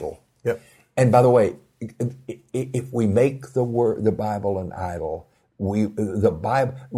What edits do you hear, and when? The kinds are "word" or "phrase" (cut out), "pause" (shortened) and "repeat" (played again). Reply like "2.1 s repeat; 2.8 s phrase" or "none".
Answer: none

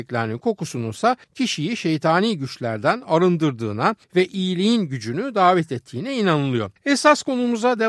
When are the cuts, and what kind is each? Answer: 1.2 s pause; 4.0 s pause; 6.8 s pause

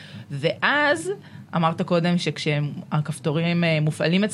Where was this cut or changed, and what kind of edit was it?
none

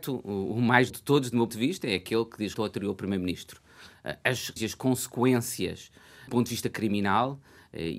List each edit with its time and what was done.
0.9 s word; 1.5 s word; 2.5 s word; 4.6 s word; 6.3 s word

